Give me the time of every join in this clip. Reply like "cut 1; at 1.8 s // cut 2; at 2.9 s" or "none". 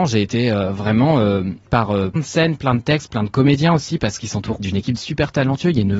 cut 1; at 1.7 s // cut 2; at 2.2 s // cut 3; at 4.6 s // cut 4; at 5.0 s